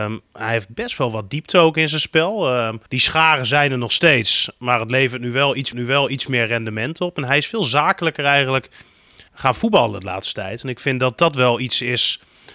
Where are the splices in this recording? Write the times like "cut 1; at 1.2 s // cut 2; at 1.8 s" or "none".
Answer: cut 1; at 2.9 s // cut 2; at 5.7 s // cut 3; at 9.3 s